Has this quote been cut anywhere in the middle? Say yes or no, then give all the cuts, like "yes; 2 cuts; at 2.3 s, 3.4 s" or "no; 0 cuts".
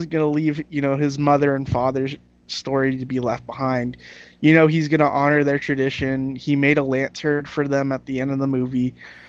no; 0 cuts